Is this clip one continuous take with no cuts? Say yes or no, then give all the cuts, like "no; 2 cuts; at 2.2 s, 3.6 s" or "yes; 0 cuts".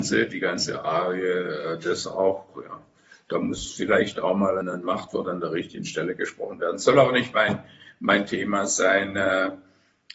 no; 1 cut; at 4.6 s